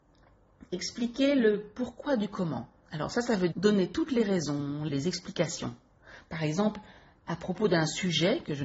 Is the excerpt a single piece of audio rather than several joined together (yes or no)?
no